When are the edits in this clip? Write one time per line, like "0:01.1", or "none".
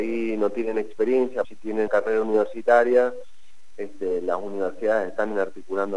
0:01.4
0:01.9